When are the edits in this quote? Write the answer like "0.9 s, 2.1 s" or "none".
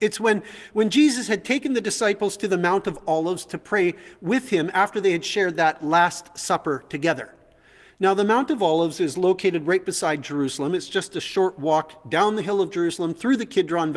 none